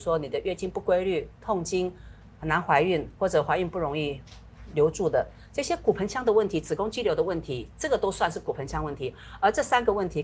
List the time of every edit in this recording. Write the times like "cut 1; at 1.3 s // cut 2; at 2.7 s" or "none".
cut 1; at 2.3 s